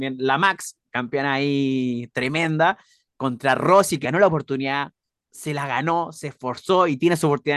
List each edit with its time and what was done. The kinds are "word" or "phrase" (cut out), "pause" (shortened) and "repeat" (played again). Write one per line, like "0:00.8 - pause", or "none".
0:04.0 - word